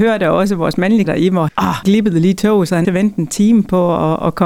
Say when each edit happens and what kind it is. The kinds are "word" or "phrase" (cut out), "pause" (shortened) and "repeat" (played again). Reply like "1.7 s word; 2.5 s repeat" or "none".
1.1 s word; 1.5 s word; 1.8 s word; 2.8 s word